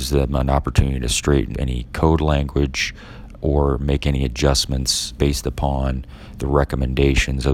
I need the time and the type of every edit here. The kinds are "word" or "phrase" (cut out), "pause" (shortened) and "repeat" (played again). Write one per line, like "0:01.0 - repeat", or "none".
0:01.5 - word
0:03.3 - word
0:05.2 - word